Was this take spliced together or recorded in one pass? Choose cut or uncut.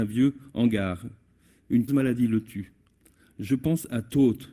cut